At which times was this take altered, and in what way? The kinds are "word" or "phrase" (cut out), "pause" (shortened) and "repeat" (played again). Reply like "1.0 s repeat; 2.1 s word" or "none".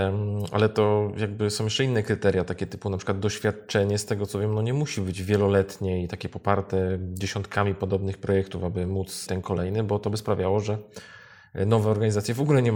9.3 s word